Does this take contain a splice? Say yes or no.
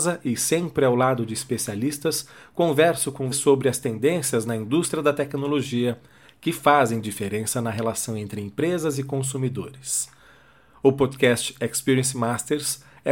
yes